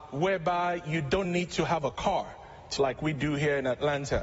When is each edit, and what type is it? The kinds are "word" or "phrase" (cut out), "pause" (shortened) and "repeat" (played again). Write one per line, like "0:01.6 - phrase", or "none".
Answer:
0:01.2 - word
0:02.8 - phrase